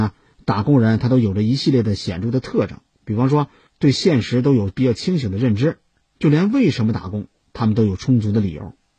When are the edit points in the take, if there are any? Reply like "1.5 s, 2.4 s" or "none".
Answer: none